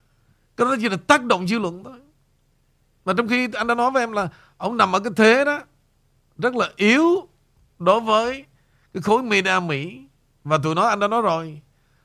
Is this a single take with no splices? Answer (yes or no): yes